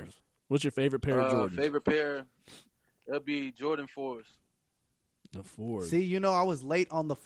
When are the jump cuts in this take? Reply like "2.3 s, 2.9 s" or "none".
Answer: none

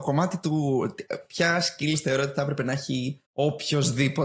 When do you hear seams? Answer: none

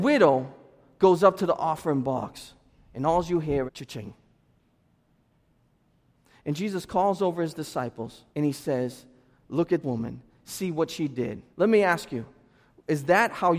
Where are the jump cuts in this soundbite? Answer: 3.7 s, 8.3 s, 9.8 s, 11.5 s

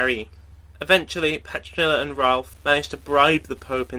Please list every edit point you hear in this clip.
none

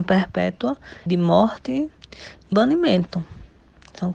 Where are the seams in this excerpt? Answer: 1.1 s, 2.5 s

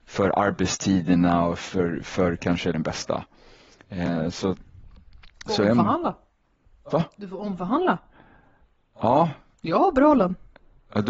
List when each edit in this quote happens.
2.7 s, 9.5 s

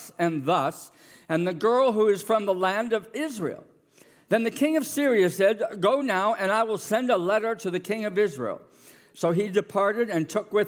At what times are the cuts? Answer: none

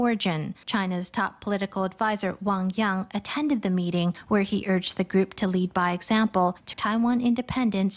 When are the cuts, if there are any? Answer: 6.7 s

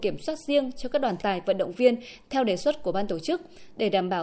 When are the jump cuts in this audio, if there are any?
1.2 s

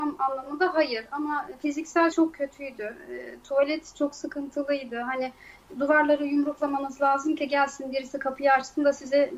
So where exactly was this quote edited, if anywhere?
2.1 s

